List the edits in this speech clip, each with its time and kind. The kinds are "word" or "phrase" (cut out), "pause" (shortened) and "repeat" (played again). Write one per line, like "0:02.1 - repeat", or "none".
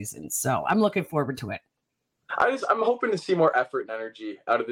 none